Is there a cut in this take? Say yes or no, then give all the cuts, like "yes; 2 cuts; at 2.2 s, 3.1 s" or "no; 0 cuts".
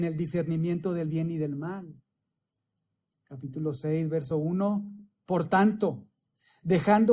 no; 0 cuts